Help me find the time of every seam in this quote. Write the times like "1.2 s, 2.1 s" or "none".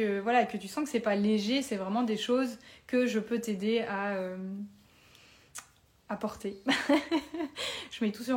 none